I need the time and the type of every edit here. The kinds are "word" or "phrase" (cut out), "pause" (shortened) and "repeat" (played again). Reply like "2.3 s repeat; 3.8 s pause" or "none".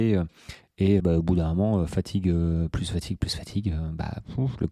1.0 s word